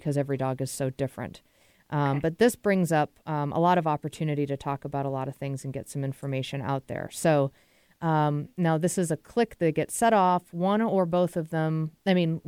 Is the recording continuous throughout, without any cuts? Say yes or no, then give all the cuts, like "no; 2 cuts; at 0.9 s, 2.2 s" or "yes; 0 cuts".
yes; 0 cuts